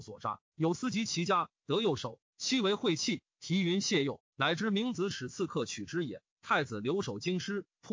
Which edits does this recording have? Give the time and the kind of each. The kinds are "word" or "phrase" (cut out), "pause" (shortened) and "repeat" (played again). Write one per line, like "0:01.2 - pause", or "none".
0:06.3 - pause